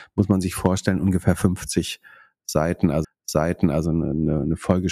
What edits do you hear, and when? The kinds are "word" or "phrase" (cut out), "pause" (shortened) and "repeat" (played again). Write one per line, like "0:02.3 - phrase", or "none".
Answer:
0:03.0 - repeat